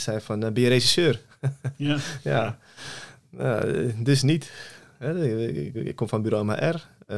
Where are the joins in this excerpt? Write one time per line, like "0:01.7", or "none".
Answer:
0:05.7